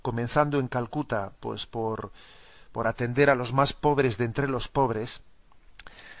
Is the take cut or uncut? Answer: uncut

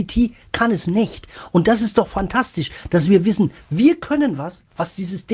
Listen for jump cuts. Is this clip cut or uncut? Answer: uncut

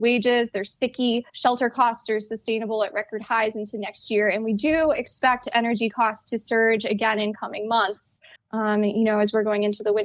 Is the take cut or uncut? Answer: cut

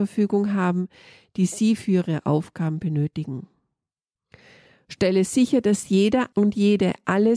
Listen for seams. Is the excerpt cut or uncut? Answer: uncut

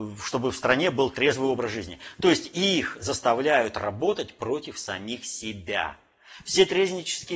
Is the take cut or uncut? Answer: uncut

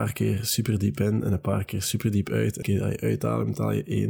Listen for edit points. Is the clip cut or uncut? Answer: cut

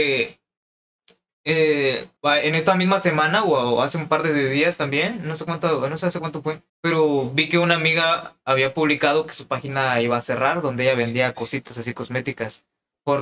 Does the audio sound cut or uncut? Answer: cut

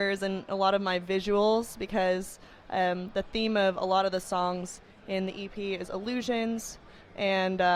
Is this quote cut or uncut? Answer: uncut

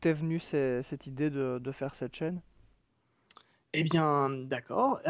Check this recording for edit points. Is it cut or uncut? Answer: uncut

